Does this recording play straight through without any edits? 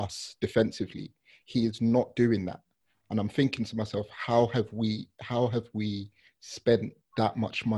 yes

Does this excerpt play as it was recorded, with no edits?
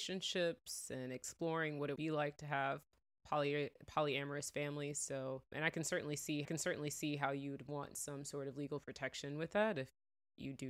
no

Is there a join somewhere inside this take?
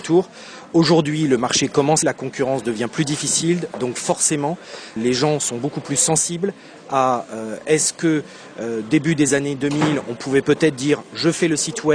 yes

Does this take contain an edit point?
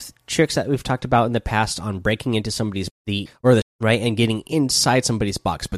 yes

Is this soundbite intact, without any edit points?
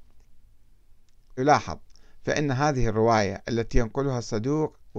no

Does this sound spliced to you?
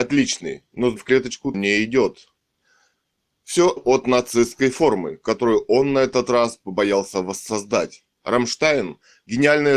yes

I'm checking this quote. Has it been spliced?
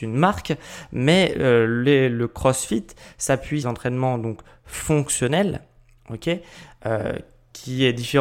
yes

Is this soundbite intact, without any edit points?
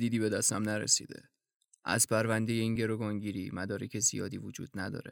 yes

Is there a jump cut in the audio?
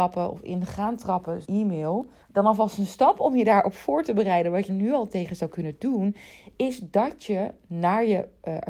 yes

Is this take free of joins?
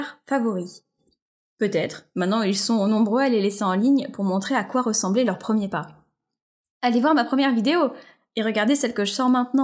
yes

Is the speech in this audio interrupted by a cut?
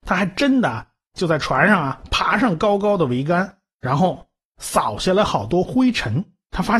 no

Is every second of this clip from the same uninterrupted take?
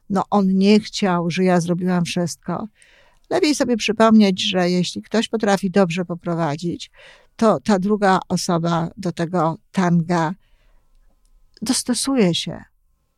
yes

